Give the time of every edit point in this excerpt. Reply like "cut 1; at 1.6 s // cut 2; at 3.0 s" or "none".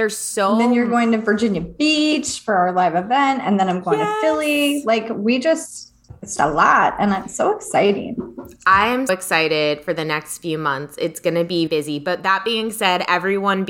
cut 1; at 6.4 s // cut 2; at 9.1 s // cut 3; at 11.7 s